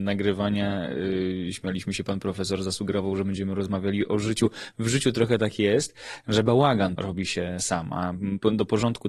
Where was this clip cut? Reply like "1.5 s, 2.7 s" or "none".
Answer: 7.0 s